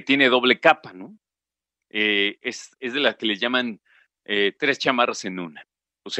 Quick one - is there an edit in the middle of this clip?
no; 0 cuts

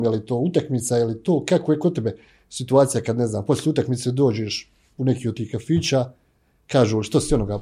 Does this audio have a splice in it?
no; 0 cuts

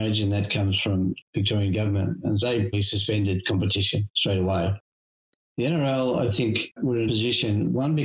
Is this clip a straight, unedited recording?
no; 3 cuts; at 2.4 s, 2.7 s, 7.1 s

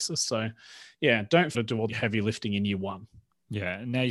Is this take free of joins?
no; 2 cuts; at 1.5 s, 1.9 s

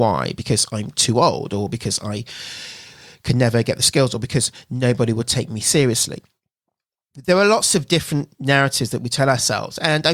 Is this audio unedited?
yes; 0 cuts

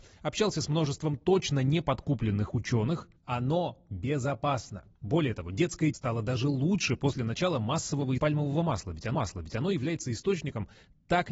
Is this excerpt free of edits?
no; 5 cuts; at 3.2 s, 4.9 s, 5.9 s, 8.2 s, 9.1 s

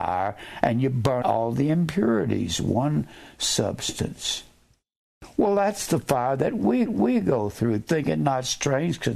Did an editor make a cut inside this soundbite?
yes; 2 cuts; at 1.2 s, 6.9 s

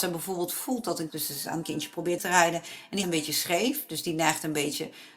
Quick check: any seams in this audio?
yes; 4 cuts; at 1.1 s, 1.6 s, 2.2 s, 3.0 s

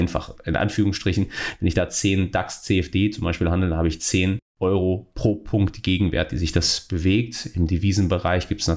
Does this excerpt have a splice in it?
no; 0 cuts

